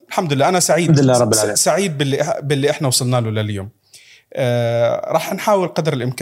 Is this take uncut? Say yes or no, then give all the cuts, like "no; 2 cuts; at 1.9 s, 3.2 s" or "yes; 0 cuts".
yes; 0 cuts